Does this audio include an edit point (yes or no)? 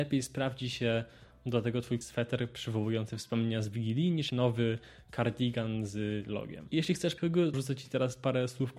yes